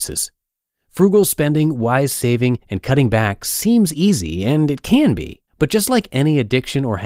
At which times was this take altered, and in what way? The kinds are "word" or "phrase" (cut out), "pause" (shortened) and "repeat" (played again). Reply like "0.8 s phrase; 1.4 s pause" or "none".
2.6 s pause; 5.5 s pause